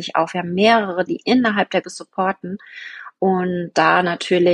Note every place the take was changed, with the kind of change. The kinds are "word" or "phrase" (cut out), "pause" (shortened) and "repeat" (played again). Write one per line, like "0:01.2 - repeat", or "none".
0:01.1 - word
0:01.8 - word